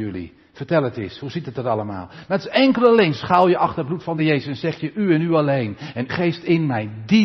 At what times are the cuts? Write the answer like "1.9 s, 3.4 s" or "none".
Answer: 4.2 s, 6.1 s